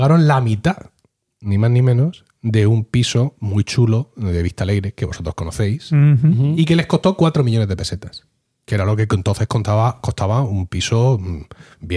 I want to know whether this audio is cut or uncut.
uncut